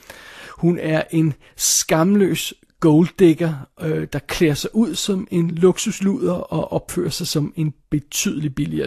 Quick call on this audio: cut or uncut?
uncut